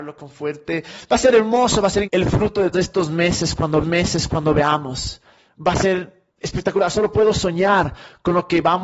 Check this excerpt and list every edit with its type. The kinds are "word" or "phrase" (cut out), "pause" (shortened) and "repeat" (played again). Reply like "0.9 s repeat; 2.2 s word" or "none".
2.0 s word; 2.7 s word; 3.8 s repeat; 6.3 s pause